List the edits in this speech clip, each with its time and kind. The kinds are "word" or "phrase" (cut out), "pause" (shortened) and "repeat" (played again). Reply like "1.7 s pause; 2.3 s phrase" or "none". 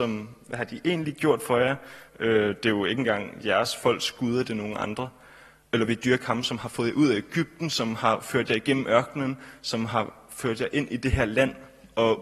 none